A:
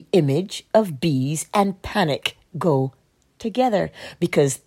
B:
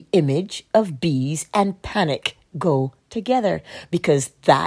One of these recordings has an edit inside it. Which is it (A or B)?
B